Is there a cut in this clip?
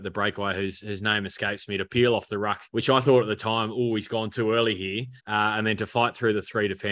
yes; 2 cuts; at 2.7 s, 5.2 s

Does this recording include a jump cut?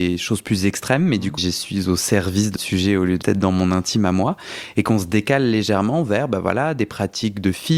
yes; 3 cuts; at 1.4 s, 2.6 s, 3.2 s

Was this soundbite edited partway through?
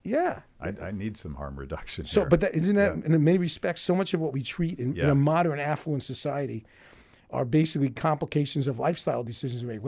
no; 0 cuts

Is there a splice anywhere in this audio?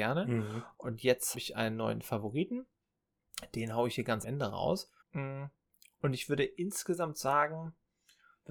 yes; 3 cuts; at 1.3 s, 4.2 s, 5.0 s

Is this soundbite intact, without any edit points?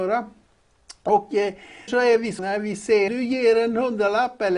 no; 3 cuts; at 1.9 s, 2.4 s, 3.1 s

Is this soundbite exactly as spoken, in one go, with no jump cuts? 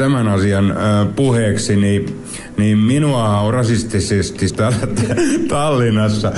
no; 1 cut; at 4.5 s

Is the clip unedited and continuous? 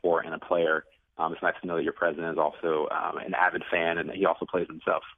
yes; 0 cuts

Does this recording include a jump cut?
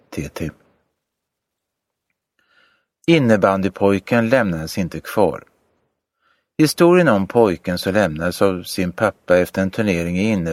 no; 0 cuts

